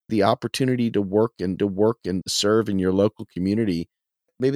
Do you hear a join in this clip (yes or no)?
yes